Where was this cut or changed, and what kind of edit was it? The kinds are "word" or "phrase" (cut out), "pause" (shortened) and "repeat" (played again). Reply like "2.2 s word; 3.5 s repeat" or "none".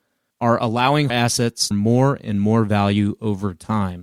1.1 s word; 1.7 s phrase